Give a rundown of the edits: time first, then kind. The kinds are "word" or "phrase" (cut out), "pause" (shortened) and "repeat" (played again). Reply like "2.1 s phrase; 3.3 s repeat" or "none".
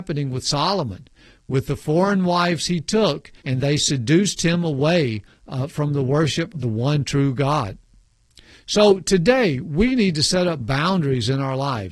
3.4 s pause; 6.5 s word